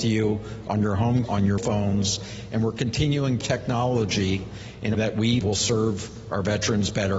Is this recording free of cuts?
no; 5 cuts; at 1.2 s, 1.6 s, 3.4 s, 4.9 s, 5.4 s

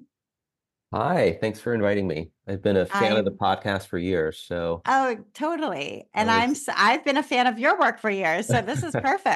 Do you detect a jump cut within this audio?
no; 0 cuts

